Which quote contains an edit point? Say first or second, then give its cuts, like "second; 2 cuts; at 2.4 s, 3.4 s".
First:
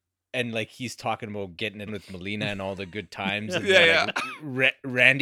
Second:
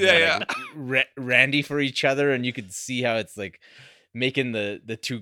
first; 1 cut; at 1.9 s